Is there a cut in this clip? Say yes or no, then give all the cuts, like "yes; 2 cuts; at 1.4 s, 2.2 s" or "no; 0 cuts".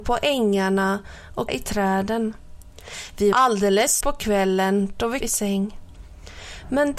yes; 4 cuts; at 1.5 s, 3.3 s, 4.0 s, 5.2 s